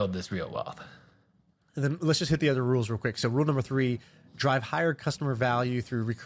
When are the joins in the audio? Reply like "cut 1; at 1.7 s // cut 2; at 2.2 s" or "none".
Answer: none

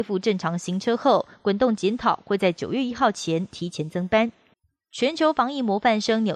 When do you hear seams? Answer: cut 1; at 4.5 s

